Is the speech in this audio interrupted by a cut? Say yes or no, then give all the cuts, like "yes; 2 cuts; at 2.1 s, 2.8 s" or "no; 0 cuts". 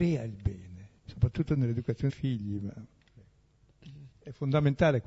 yes; 3 cuts; at 1.0 s, 2.1 s, 4.1 s